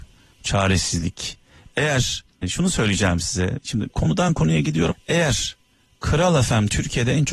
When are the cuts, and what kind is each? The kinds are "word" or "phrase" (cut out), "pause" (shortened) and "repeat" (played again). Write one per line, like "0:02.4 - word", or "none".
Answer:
0:02.4 - word
0:03.9 - word
0:04.9 - word